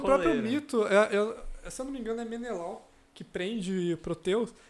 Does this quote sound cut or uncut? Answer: uncut